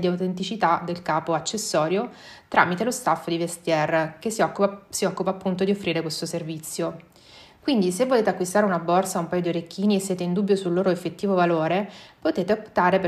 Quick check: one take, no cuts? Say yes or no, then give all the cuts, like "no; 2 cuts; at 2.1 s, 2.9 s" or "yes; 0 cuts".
yes; 0 cuts